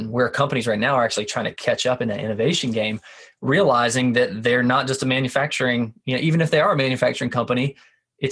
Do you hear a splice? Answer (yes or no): no